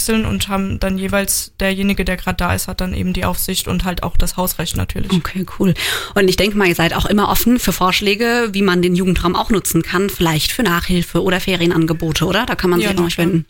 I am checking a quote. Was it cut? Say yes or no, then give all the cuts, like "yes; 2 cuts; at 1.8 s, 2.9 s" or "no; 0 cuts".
no; 0 cuts